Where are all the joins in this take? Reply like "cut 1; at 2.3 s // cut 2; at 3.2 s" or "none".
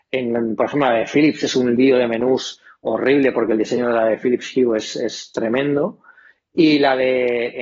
none